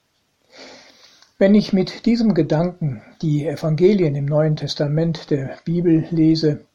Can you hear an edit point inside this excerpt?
no; 0 cuts

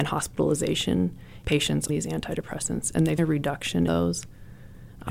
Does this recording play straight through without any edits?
no; 4 cuts; at 1.4 s, 1.9 s, 3.2 s, 3.9 s

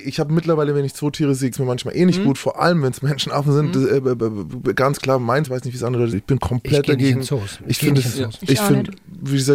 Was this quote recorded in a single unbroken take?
no; 3 cuts; at 1.5 s, 5.4 s, 6.1 s

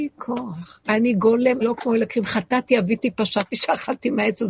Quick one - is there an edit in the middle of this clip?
yes; 1 cut; at 1.6 s

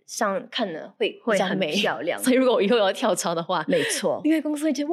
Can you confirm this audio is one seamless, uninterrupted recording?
yes; 0 cuts

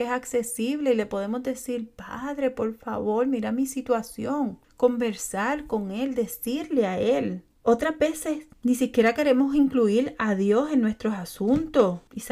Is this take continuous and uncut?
yes; 0 cuts

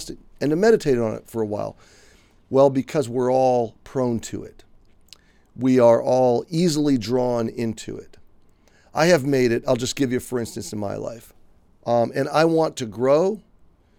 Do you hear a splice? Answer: no; 0 cuts

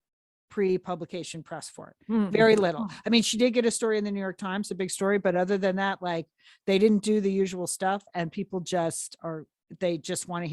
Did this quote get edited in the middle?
no; 0 cuts

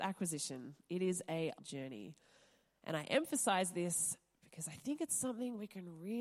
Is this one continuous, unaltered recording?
no; 1 cut; at 1.6 s

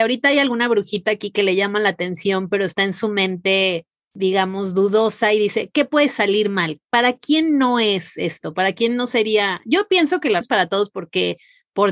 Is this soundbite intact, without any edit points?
no; 1 cut; at 10.4 s

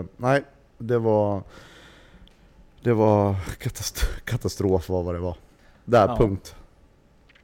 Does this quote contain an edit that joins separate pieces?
no; 0 cuts

